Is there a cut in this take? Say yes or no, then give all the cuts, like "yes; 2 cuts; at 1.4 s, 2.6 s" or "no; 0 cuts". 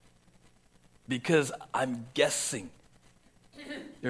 no; 0 cuts